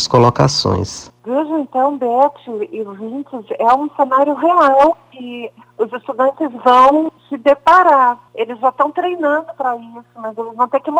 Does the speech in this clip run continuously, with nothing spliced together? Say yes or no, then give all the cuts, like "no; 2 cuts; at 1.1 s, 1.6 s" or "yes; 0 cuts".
no; 3 cuts; at 1.2 s, 7.2 s, 8.3 s